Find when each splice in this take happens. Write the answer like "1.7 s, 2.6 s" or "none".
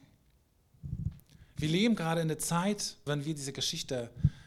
3.1 s